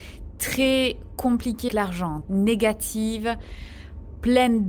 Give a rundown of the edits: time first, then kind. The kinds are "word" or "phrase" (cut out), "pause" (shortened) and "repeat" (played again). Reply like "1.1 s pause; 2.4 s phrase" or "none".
1.7 s word; 2.2 s word